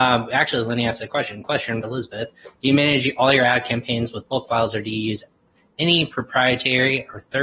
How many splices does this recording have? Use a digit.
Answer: 1